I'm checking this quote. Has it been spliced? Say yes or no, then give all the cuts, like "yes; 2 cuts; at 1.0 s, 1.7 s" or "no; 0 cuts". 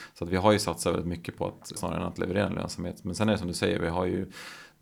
yes; 1 cut; at 1.8 s